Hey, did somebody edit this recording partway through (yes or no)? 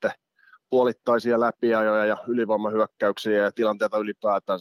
no